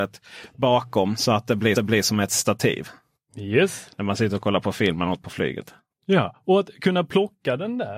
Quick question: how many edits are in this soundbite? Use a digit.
1